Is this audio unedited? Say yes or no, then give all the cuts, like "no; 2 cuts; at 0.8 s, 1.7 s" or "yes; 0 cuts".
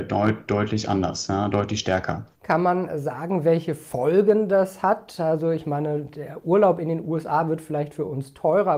no; 1 cut; at 2.3 s